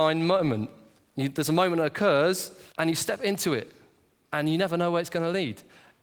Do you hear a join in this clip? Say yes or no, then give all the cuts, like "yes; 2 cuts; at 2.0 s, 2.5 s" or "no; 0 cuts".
yes; 1 cut; at 2.7 s